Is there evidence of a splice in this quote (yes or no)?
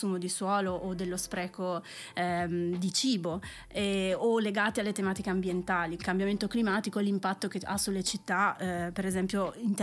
yes